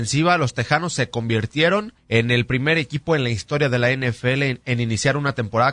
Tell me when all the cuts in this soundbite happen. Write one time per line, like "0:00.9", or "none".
0:02.0